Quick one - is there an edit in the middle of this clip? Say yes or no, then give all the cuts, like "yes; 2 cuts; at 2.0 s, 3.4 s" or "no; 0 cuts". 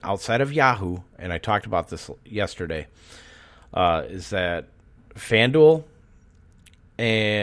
no; 0 cuts